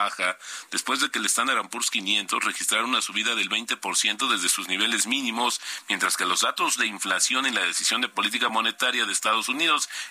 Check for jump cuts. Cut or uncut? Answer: uncut